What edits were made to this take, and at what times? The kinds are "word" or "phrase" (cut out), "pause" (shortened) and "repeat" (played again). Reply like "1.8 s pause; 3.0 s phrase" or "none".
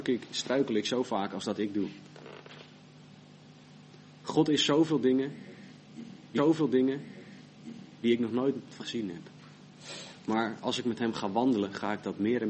6.4 s repeat; 8.8 s word